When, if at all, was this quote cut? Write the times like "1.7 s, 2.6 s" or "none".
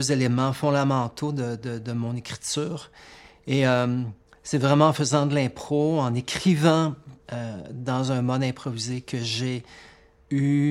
none